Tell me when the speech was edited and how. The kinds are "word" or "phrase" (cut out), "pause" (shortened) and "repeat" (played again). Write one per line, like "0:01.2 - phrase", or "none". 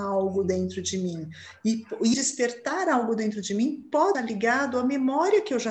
0:02.1 - word
0:04.1 - word